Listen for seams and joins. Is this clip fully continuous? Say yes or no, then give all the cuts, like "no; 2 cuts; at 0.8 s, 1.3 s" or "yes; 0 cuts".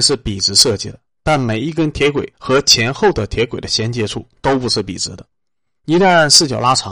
no; 1 cut; at 2.3 s